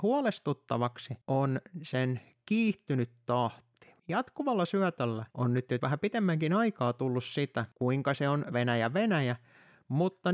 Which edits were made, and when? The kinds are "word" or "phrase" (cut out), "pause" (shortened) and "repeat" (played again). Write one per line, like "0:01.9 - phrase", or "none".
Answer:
0:01.2 - pause
0:04.0 - pause
0:05.3 - pause
0:05.8 - word
0:07.7 - pause
0:08.5 - word